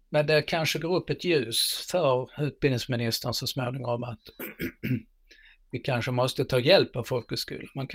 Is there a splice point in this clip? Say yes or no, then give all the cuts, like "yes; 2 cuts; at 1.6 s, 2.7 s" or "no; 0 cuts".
no; 0 cuts